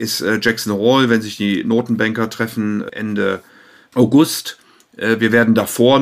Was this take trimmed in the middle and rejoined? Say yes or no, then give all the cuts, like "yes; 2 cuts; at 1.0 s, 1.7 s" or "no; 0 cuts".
no; 0 cuts